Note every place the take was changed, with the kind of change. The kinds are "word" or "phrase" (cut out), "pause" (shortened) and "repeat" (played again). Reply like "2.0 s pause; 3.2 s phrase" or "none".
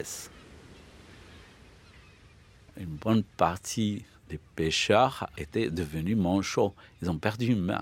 none